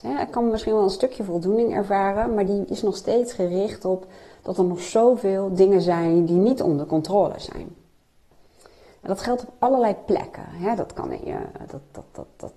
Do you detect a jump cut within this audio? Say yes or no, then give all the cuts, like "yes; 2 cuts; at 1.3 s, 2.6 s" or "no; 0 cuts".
no; 0 cuts